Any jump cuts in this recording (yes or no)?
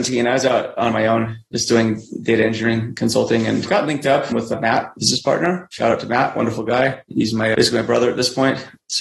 no